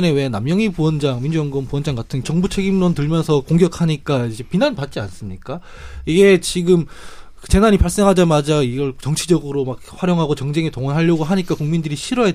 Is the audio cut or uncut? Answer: cut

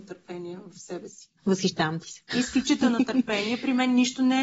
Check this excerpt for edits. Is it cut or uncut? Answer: cut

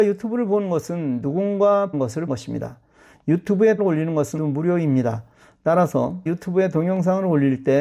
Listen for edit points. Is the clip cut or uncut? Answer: cut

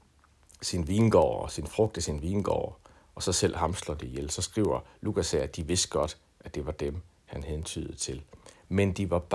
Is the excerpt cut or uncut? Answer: uncut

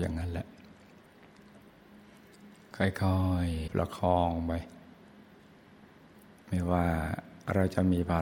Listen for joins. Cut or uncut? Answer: cut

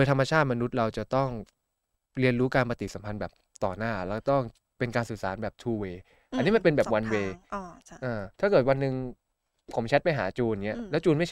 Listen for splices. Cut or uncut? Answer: cut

